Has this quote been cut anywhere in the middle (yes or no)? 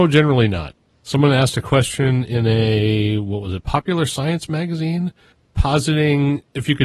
no